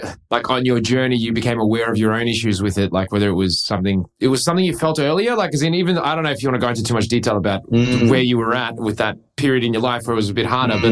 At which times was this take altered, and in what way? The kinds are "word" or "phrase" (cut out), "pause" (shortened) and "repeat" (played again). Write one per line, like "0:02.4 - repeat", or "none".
none

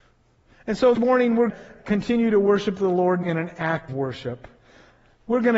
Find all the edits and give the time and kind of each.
0:00.9 - word
0:01.5 - word
0:03.2 - word
0:03.9 - word

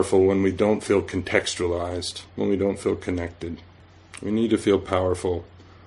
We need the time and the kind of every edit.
0:02.3 - pause

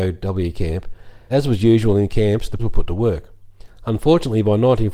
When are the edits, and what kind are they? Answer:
0:01.3 - word
0:02.6 - word

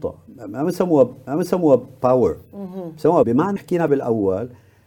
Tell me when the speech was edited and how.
0:01.3 - repeat
0:03.2 - phrase
0:03.6 - word
0:03.9 - word

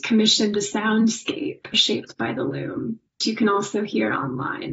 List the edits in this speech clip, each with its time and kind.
0:01.7 - word
0:03.2 - word

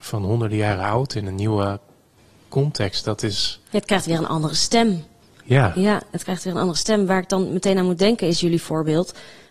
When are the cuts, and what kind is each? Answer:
none

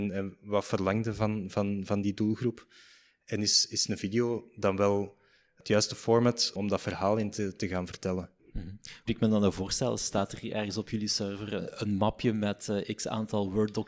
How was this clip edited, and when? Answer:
0:06.6 - word
0:09.1 - word

